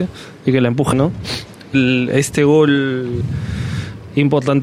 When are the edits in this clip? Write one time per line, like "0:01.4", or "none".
0:00.9
0:01.7